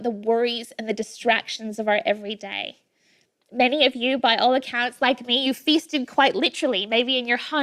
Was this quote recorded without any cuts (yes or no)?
yes